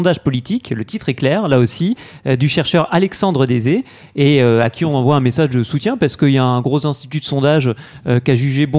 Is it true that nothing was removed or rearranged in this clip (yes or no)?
yes